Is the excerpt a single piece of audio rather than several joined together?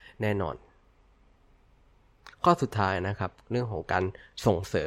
no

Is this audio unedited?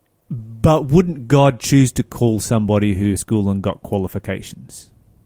no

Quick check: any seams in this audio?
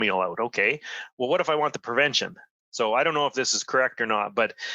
no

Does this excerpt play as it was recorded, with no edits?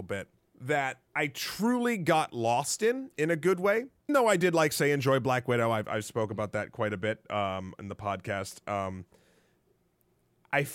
no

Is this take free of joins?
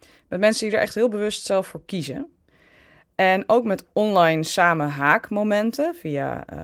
yes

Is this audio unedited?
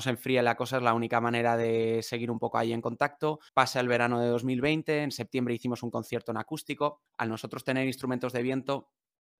no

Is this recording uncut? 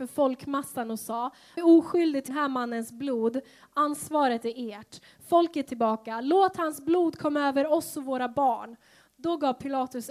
no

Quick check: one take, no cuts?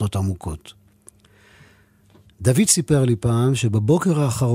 yes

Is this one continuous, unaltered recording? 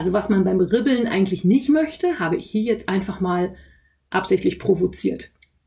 yes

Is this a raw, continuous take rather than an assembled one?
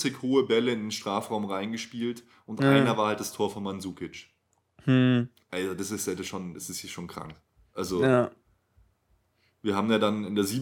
yes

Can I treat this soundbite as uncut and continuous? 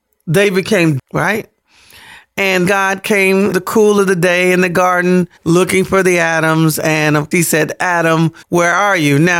no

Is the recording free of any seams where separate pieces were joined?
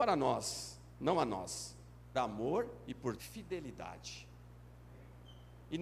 no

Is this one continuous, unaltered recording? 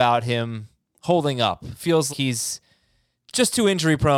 no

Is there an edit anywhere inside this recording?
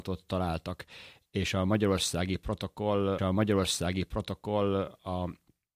yes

